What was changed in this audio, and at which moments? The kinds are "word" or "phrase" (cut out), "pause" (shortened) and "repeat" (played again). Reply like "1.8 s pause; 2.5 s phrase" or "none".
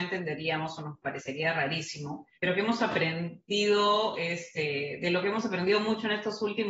2.3 s pause

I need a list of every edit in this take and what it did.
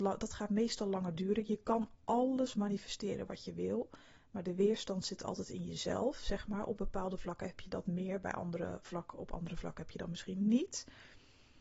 none

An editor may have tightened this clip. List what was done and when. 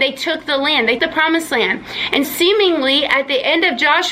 1.0 s word; 2.2 s word

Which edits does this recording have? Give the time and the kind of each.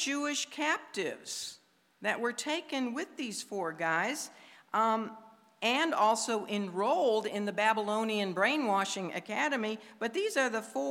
none

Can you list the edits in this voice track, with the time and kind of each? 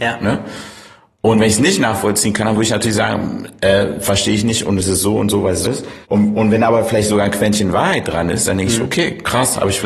5.6 s word; 6.0 s pause

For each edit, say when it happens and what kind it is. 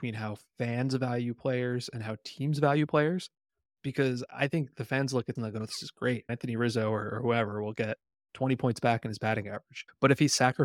5.4 s word

